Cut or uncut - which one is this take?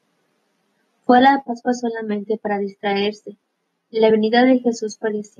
uncut